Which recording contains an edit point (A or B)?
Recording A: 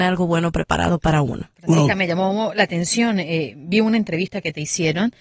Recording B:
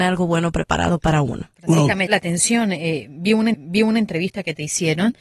B